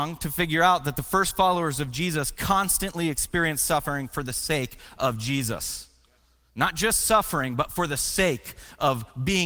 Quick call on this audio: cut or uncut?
uncut